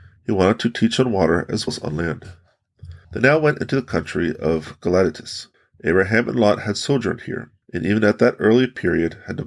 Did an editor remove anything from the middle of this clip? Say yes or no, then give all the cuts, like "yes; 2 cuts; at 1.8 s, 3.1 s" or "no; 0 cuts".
yes; 4 cuts; at 1.7 s, 3.0 s, 5.5 s, 7.6 s